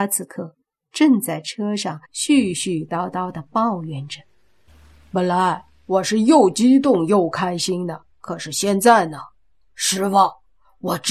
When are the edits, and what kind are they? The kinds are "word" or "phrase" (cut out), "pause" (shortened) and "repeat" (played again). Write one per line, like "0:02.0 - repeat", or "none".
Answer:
0:02.0 - pause
0:04.7 - pause
0:08.1 - pause